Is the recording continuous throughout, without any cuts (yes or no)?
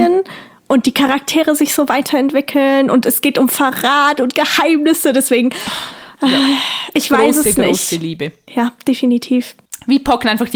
yes